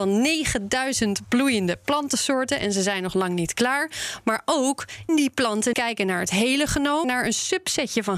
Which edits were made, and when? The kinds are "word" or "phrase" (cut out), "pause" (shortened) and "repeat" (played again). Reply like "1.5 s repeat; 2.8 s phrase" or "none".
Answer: 5.1 s word; 5.7 s word; 7.0 s word